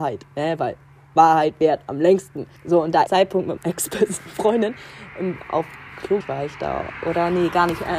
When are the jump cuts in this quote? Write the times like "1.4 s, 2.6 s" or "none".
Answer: 2.6 s, 3.1 s, 3.6 s, 6.2 s